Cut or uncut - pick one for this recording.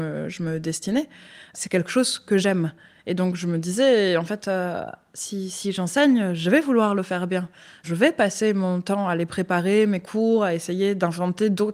uncut